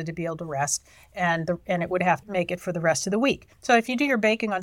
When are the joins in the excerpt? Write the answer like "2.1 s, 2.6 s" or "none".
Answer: 2.2 s, 3.5 s